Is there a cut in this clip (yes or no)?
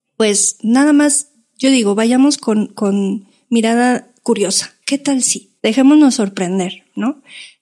yes